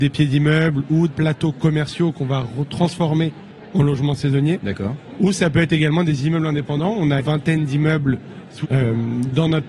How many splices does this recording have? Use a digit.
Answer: 3